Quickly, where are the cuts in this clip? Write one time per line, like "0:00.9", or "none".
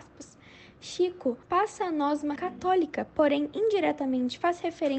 0:01.4
0:02.4